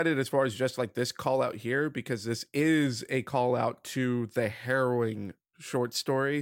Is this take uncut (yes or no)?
yes